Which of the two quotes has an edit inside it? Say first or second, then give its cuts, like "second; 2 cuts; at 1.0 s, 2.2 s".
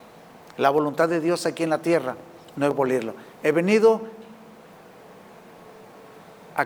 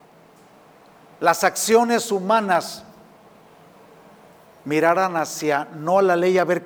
first; 2 cuts; at 2.7 s, 3.3 s